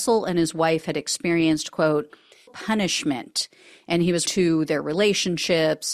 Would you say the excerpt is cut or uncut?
cut